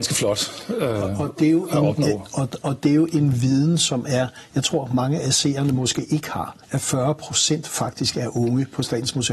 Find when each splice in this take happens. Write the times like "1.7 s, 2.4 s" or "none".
6.6 s